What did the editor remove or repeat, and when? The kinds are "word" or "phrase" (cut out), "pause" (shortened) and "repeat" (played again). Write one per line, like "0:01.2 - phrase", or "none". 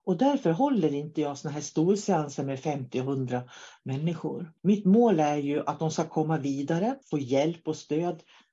0:04.6 - pause
0:07.0 - pause